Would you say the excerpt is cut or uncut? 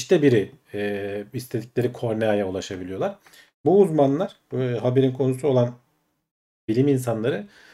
uncut